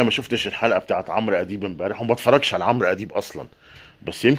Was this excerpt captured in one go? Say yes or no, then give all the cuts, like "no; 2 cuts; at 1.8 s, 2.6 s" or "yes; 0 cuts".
yes; 0 cuts